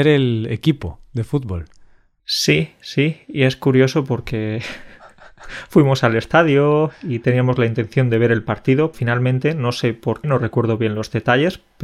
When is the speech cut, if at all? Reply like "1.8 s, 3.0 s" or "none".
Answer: 8.9 s, 10.2 s